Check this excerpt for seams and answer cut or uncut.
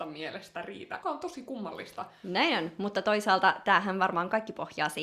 cut